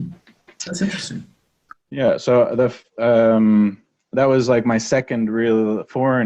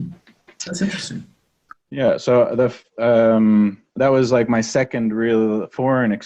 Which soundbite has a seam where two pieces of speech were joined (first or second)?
second